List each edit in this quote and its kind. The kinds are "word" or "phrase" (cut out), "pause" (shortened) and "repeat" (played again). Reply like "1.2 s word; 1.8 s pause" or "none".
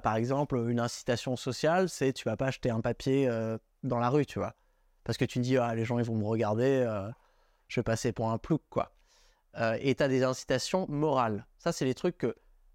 none